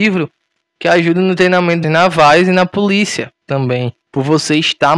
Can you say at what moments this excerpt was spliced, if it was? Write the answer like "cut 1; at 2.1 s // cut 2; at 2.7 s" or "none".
cut 1; at 1.8 s // cut 2; at 4.0 s